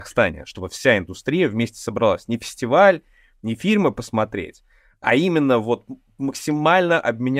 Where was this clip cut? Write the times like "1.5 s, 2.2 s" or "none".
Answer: none